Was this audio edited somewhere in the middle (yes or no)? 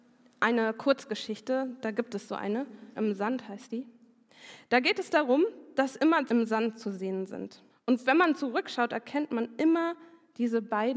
yes